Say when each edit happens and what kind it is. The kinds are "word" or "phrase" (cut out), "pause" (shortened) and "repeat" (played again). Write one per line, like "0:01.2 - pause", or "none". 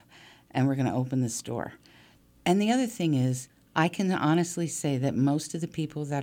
none